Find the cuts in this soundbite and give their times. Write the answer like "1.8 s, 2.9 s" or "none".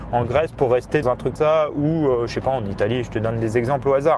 1.0 s, 1.4 s